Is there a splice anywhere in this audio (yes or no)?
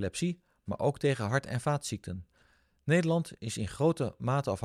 no